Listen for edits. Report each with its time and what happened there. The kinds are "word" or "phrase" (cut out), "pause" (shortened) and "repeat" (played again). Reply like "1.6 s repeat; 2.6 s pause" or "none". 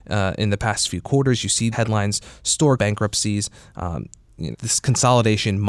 1.7 s word; 2.8 s word; 4.5 s word